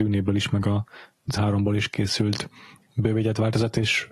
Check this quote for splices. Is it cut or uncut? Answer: cut